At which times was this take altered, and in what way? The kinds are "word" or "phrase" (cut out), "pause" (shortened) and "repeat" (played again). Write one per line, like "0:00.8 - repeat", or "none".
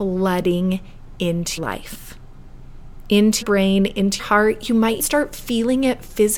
0:01.6 - word
0:03.4 - word
0:04.2 - word
0:05.0 - word